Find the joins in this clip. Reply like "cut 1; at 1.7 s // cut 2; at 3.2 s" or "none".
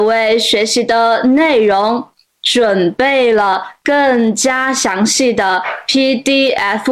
none